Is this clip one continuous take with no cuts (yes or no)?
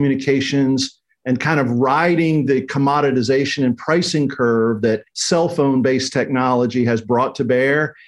no